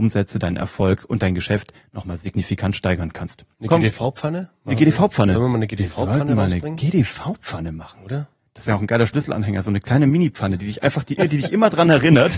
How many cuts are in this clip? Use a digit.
1